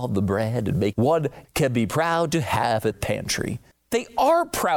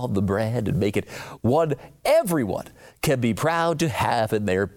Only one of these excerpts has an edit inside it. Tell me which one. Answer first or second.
first